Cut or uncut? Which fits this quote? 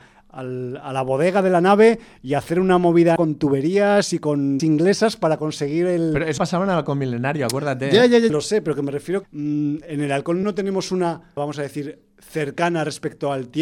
cut